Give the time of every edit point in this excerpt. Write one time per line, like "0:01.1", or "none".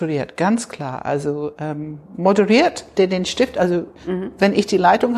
0:03.0
0:04.0